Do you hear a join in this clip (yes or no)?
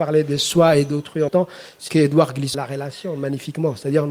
yes